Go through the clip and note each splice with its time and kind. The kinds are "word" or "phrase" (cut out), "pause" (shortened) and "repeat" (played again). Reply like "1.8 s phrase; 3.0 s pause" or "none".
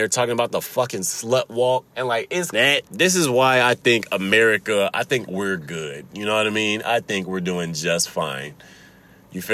1.9 s pause; 2.5 s phrase; 2.9 s pause